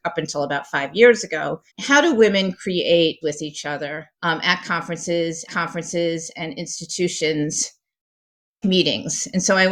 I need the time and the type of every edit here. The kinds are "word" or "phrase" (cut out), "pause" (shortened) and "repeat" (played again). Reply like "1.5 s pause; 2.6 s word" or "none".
1.7 s pause; 3.2 s word; 4.1 s pause; 5.5 s repeat; 8.6 s word